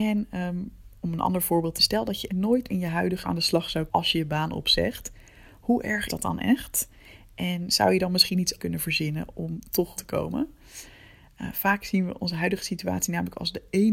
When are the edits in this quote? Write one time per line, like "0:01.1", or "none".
0:01.8
0:02.3
0:02.7
0:03.2
0:03.9
0:06.1
0:08.6
0:10.0

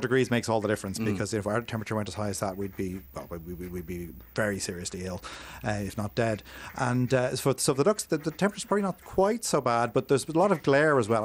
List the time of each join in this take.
none

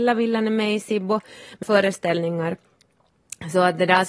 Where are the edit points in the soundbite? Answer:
0:01.6

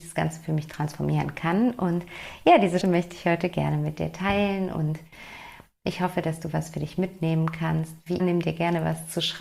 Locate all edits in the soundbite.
0:02.8
0:08.2

